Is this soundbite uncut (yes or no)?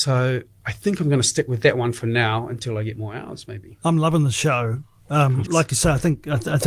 no